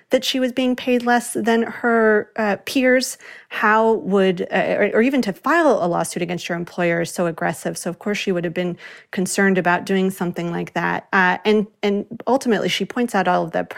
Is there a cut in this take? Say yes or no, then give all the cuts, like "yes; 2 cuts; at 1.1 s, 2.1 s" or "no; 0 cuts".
no; 0 cuts